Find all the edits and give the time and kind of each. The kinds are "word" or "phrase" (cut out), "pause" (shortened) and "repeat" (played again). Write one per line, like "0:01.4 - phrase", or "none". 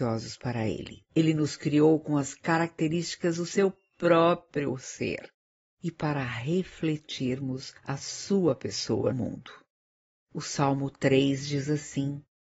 0:01.1 - pause
0:07.8 - pause
0:09.1 - word